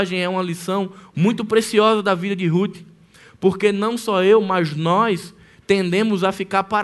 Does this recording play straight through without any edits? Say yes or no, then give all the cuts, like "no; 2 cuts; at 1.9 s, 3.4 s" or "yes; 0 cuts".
yes; 0 cuts